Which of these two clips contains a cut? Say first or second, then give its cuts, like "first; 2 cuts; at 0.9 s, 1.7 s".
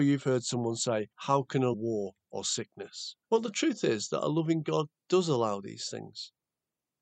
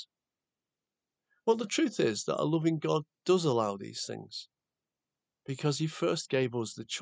first; 3 cuts; at 1.1 s, 1.7 s, 3.2 s